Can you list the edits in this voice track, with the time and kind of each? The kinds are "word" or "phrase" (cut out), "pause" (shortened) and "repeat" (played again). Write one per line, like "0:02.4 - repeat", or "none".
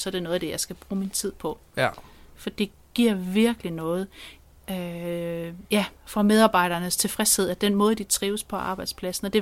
0:05.7 - pause